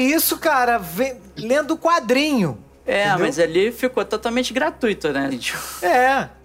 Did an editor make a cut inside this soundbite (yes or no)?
yes